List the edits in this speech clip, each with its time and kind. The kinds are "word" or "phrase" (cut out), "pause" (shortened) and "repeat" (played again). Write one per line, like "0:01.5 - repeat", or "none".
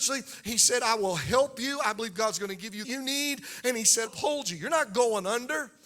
0:02.8 - phrase
0:04.1 - word